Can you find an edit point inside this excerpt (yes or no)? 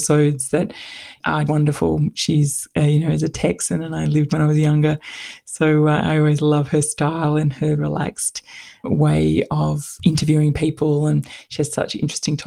yes